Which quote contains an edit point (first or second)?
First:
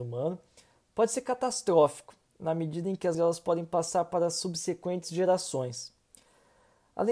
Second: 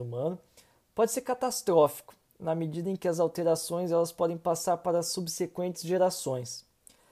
first